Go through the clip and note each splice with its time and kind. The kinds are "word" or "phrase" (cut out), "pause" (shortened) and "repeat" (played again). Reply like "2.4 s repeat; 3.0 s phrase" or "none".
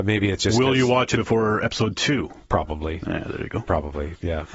1.2 s word